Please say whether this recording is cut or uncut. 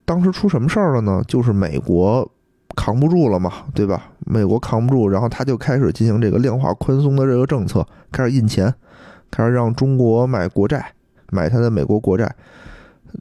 uncut